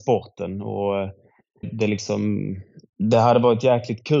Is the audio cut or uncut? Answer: cut